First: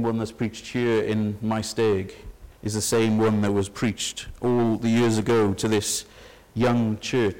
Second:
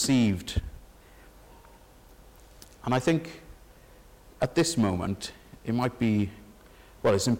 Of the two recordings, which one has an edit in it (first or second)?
first